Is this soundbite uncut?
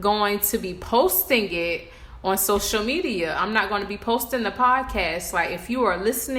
yes; 0 cuts

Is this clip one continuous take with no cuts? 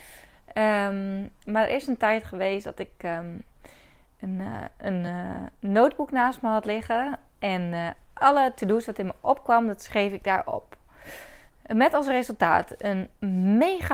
yes; 0 cuts

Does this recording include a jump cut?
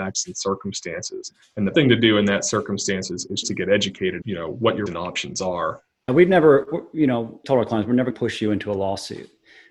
yes; 7 cuts; at 1.7 s, 3.4 s, 4.2 s, 4.9 s, 6.1 s, 7.4 s, 8.1 s

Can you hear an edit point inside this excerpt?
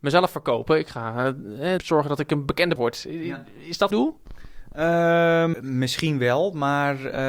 yes; 4 cuts; at 1.8 s, 2.8 s, 3.9 s, 5.5 s

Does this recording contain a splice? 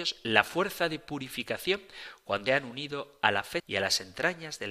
yes; 2 cuts; at 2.5 s, 3.6 s

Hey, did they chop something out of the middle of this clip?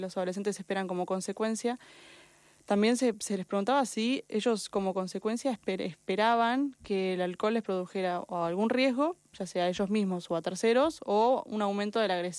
no; 0 cuts

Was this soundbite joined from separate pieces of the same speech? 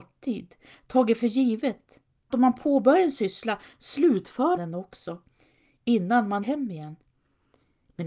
yes; 3 cuts; at 2.3 s, 4.6 s, 6.4 s

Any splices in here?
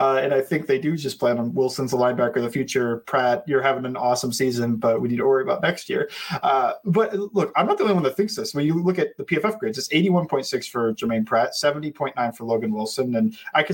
no; 0 cuts

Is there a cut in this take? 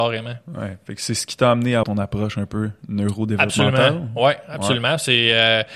yes; 1 cut; at 1.8 s

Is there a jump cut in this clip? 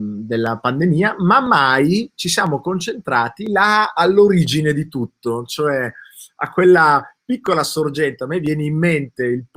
no; 0 cuts

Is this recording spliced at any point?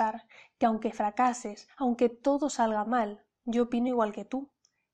no; 0 cuts

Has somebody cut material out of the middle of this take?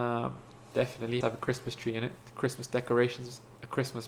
yes; 1 cut; at 1.2 s

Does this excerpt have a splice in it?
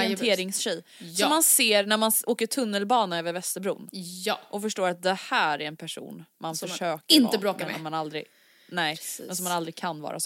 no; 0 cuts

